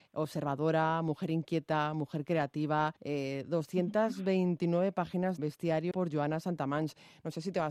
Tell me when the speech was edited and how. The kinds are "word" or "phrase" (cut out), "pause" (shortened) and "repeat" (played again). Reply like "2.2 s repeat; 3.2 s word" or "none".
3.0 s pause; 5.4 s phrase; 5.9 s word